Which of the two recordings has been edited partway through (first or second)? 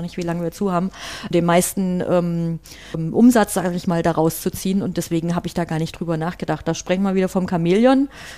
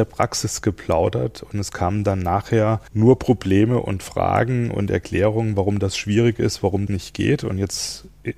second